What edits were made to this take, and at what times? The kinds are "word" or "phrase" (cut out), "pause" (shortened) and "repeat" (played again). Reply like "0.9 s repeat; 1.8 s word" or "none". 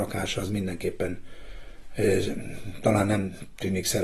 none